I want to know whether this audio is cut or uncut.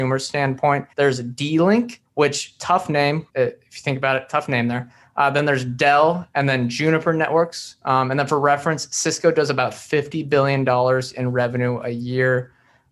cut